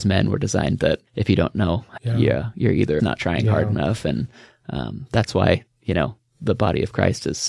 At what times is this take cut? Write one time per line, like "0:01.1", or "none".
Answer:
0:01.1
0:02.0
0:03.0